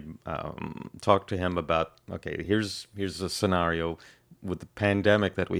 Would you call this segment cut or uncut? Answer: uncut